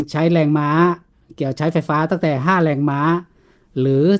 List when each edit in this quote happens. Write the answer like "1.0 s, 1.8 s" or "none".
none